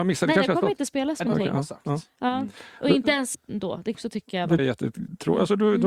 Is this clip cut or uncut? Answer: cut